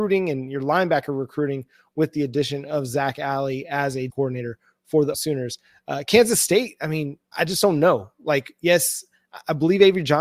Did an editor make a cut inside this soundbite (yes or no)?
yes